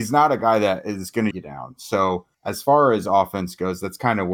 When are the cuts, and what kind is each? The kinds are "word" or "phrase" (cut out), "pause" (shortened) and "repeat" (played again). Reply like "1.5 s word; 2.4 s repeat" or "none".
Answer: 1.3 s phrase; 2.3 s pause